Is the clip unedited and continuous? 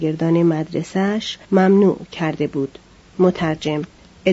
no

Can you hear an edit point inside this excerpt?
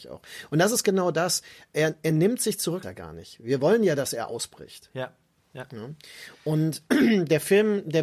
yes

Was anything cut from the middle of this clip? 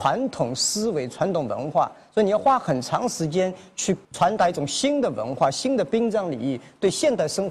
yes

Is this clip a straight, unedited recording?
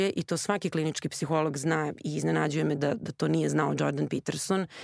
yes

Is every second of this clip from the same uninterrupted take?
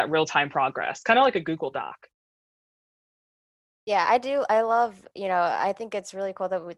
yes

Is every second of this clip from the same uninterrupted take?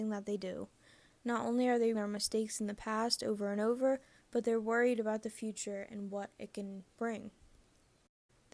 no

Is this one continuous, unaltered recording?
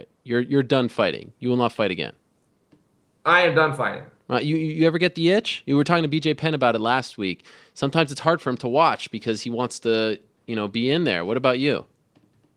yes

